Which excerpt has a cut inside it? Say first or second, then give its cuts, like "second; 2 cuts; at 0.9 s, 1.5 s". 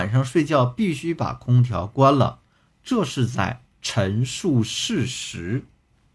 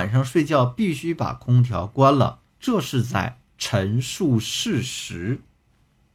second; 1 cut; at 2.5 s